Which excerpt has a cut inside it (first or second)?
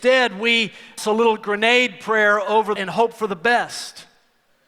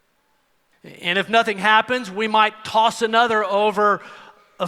first